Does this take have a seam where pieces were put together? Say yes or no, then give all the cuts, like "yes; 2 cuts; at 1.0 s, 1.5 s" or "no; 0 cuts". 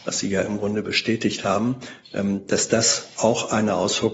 no; 0 cuts